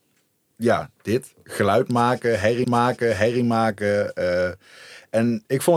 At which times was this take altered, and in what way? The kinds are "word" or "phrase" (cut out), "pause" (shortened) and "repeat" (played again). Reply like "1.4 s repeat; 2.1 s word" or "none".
2.6 s repeat